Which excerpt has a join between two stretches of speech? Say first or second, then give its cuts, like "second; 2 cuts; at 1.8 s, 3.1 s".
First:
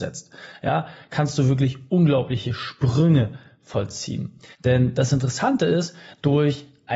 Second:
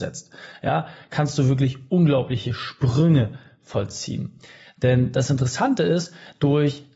first; 1 cut; at 4.5 s